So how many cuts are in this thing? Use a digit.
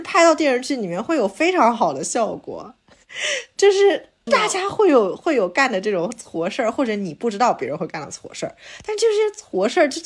1